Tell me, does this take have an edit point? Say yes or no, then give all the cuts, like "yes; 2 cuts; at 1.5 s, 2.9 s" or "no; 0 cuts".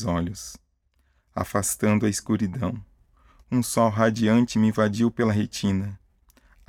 no; 0 cuts